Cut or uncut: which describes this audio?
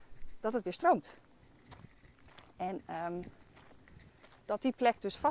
uncut